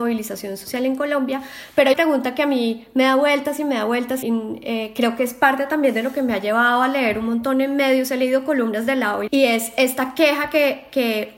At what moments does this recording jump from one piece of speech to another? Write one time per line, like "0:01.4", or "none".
0:01.9
0:04.2
0:09.3